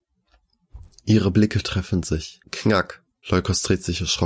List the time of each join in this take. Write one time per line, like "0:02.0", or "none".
0:02.4